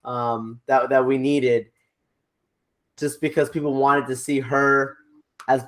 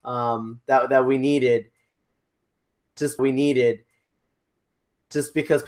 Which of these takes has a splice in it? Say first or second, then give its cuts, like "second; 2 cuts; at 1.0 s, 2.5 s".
second; 1 cut; at 3.2 s